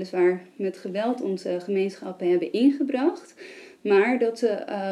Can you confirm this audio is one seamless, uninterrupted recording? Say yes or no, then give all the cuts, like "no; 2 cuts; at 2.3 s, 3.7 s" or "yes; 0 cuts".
yes; 0 cuts